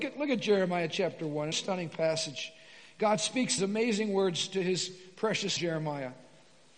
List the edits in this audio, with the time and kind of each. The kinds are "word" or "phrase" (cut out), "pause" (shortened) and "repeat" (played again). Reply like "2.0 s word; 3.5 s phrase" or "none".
1.5 s word; 3.6 s word; 5.6 s word